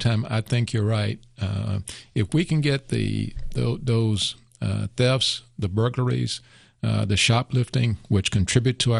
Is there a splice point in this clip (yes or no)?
no